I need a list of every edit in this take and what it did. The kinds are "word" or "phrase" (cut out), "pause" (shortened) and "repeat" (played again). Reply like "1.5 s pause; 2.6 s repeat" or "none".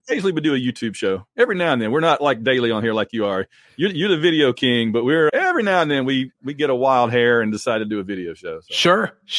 5.3 s word